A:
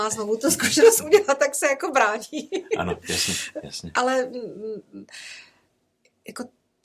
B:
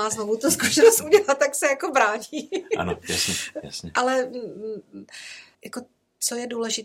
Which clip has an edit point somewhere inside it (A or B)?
B